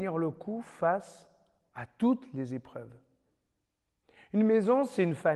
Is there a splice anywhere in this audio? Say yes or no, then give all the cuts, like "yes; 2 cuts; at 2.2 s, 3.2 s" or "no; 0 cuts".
no; 0 cuts